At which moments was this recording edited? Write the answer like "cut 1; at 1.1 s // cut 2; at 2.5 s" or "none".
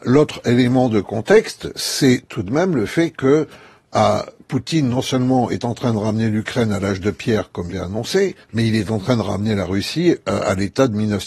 cut 1; at 7.7 s // cut 2; at 8.4 s